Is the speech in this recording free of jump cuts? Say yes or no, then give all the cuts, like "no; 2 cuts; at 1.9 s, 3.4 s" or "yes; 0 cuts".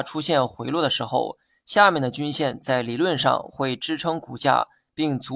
yes; 0 cuts